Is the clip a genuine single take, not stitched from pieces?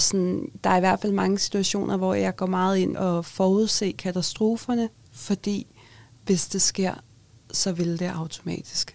no; 1 cut; at 2.9 s

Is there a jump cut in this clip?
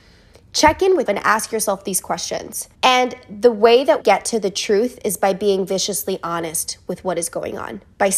yes; 3 cuts; at 1.1 s, 2.7 s, 4.0 s

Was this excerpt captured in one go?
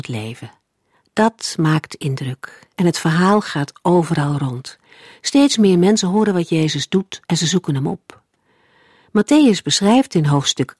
no; 2 cuts; at 0.9 s, 7.2 s

